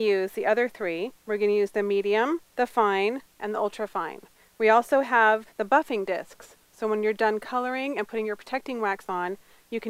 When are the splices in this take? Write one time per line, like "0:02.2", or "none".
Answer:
0:01.2
0:02.5
0:03.3
0:04.4
0:05.5